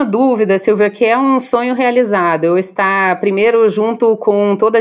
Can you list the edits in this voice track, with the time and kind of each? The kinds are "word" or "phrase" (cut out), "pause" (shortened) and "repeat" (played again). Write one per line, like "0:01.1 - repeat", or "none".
none